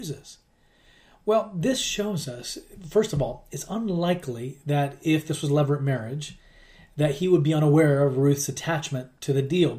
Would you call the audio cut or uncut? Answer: uncut